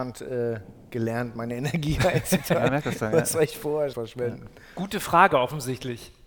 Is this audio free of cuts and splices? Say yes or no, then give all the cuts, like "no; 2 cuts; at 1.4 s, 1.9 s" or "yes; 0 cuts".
no; 2 cuts; at 2.7 s, 3.9 s